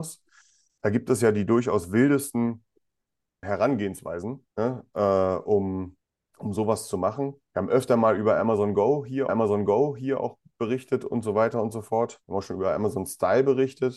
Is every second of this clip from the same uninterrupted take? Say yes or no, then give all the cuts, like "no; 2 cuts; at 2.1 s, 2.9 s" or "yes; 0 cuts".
no; 6 cuts; at 3.4 s, 4.5 s, 6.0 s, 7.4 s, 9.3 s, 12.2 s